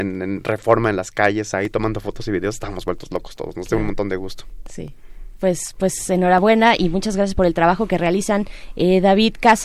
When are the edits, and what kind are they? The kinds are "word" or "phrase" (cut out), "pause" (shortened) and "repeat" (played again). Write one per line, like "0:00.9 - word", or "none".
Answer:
none